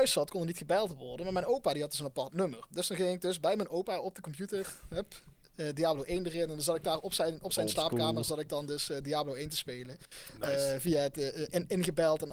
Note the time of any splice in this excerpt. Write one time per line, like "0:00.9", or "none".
none